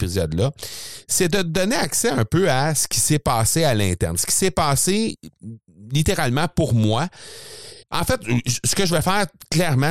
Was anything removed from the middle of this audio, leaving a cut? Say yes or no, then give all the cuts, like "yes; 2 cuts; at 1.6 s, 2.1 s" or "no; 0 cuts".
yes; 1 cut; at 7.8 s